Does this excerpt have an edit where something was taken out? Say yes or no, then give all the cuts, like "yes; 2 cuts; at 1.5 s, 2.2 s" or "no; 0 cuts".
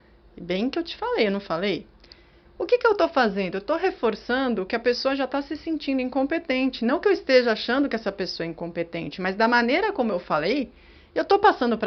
no; 0 cuts